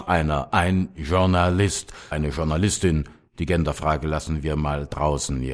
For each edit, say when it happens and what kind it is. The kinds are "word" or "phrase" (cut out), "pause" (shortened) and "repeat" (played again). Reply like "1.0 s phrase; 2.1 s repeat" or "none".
2.1 s word